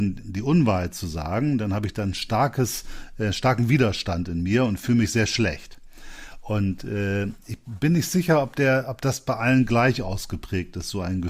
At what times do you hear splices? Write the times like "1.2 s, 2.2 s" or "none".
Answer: none

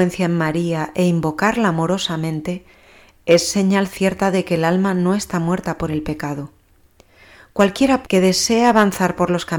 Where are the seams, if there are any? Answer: 8.0 s

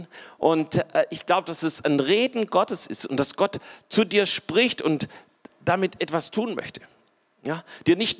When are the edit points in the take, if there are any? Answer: none

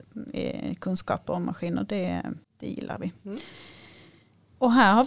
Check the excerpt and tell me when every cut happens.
2.4 s

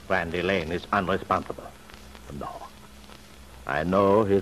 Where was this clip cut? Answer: none

